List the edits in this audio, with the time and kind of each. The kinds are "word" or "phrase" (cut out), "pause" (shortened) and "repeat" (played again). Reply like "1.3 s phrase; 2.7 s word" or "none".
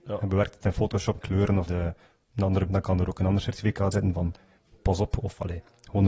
1.2 s word; 1.7 s word; 2.7 s word; 3.9 s word